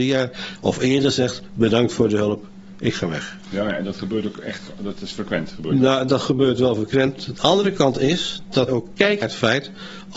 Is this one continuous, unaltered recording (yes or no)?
no